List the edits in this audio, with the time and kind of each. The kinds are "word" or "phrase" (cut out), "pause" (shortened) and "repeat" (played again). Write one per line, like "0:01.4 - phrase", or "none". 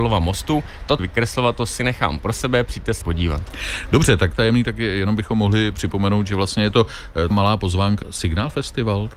0:01.0 - phrase
0:03.0 - phrase
0:04.3 - phrase
0:07.3 - word
0:08.0 - word